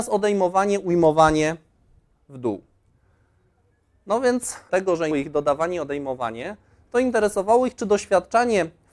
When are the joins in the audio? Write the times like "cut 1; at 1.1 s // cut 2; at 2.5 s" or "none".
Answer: cut 1; at 4.7 s // cut 2; at 5.1 s